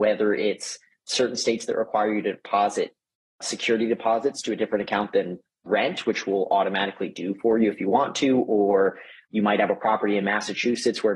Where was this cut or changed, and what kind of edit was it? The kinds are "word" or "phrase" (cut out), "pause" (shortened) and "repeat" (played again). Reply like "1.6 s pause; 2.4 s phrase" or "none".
none